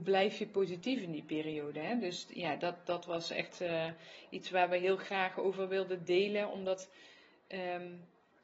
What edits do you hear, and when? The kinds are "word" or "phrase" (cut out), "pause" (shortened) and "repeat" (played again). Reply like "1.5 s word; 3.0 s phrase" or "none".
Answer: none